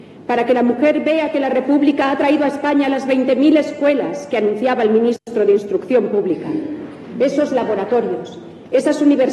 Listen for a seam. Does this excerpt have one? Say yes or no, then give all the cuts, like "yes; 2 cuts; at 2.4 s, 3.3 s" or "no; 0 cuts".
no; 0 cuts